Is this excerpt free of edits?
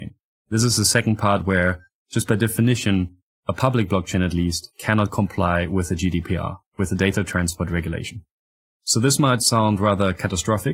yes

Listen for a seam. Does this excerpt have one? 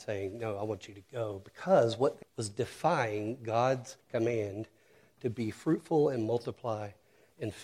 yes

